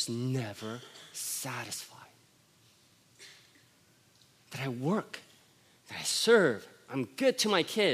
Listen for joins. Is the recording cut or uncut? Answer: uncut